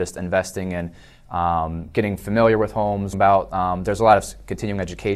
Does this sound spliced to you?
yes; 1 cut; at 3.1 s

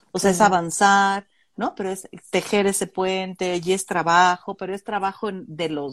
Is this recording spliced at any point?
no; 0 cuts

